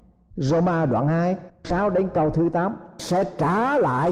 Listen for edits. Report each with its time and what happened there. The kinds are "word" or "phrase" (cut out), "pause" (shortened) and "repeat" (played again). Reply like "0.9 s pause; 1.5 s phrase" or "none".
1.6 s word; 3.0 s word